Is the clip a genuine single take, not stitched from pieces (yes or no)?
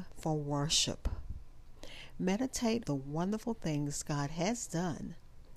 no